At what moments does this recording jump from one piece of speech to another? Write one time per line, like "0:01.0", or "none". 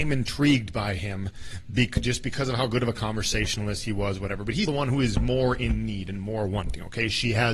0:04.7